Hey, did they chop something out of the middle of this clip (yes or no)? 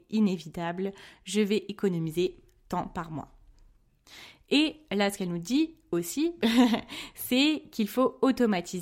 no